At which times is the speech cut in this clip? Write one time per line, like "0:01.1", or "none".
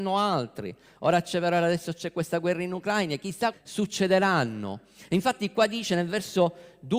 0:03.5